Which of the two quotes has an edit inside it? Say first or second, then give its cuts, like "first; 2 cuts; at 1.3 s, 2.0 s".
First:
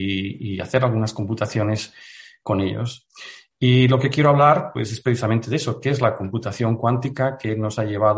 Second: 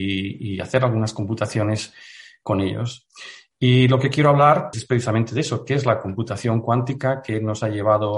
second; 1 cut; at 4.7 s